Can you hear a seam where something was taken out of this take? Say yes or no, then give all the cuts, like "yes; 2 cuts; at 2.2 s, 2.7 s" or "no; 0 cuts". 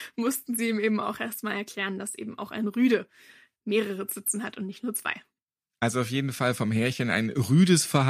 no; 0 cuts